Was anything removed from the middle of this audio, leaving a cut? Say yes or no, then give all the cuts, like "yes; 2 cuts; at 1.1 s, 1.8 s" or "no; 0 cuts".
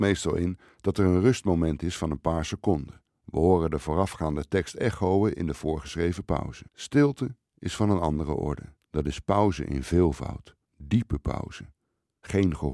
yes; 4 cuts; at 3.1 s, 6.7 s, 8.8 s, 10.6 s